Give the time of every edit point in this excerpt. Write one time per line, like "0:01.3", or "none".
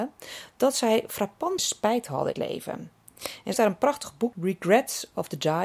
0:01.6
0:02.3
0:03.5
0:04.3

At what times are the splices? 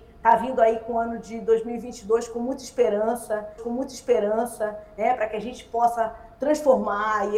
0:03.6

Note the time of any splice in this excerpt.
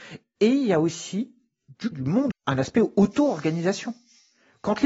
0:01.9
0:02.3

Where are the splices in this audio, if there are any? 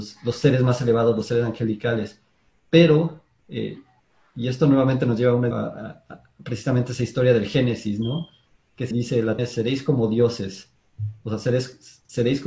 0:05.5
0:08.9
0:09.4

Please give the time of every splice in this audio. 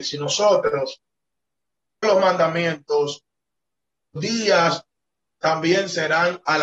0:02.0
0:04.2

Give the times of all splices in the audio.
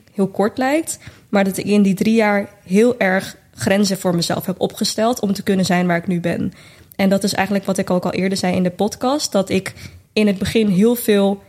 none

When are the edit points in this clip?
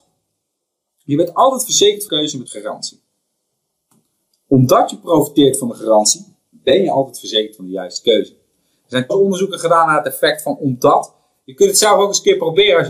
0:02.1
0:02.5
0:09.1

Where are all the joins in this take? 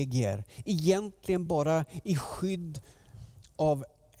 none

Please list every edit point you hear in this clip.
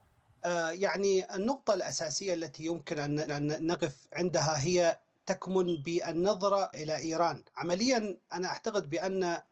0:03.3
0:06.7
0:07.5

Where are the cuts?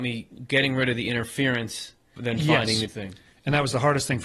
0:02.2
0:02.9

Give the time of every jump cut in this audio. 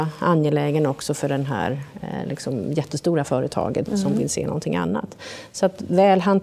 0:03.9

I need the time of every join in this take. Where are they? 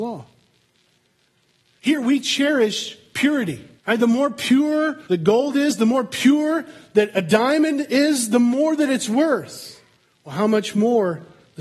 0:03.8
0:05.0
0:10.0

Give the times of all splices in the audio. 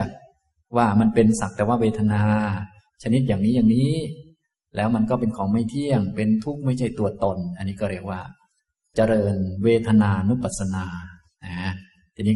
none

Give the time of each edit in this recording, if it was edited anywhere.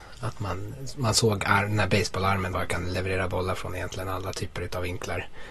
0:02.5

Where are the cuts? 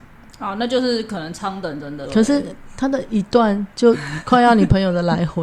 0:02.1

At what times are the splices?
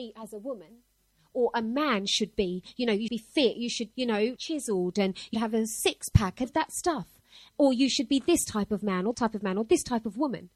0:03.1
0:03.9
0:04.4
0:05.3
0:06.4
0:09.1

